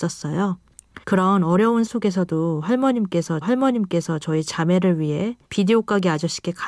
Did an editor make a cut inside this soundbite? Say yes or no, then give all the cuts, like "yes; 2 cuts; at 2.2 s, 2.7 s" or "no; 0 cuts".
yes; 4 cuts; at 1.0 s, 1.9 s, 3.4 s, 5.4 s